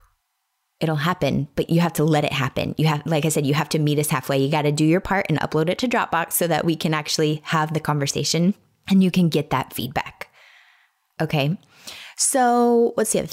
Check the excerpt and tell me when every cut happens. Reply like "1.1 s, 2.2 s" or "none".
none

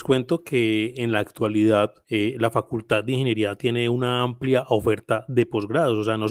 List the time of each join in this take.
2.0 s

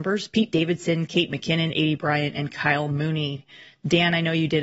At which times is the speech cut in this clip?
none

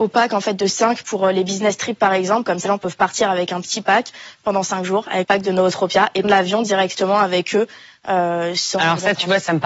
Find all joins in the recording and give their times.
2.7 s, 5.2 s, 6.2 s

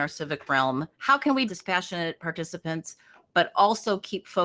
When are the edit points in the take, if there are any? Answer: 0.9 s, 1.5 s

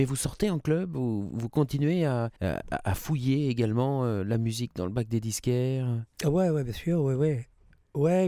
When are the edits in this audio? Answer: 2.4 s, 6.1 s

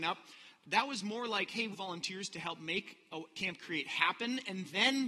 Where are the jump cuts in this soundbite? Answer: 1.7 s

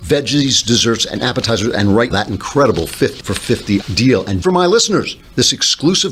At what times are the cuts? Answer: 2.1 s, 3.2 s, 3.8 s, 4.4 s

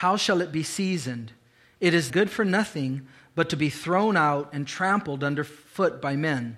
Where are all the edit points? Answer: 2.1 s

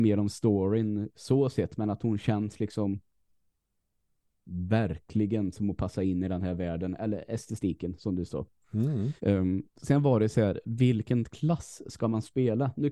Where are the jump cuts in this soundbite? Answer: 9.2 s

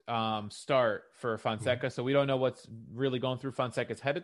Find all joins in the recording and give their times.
none

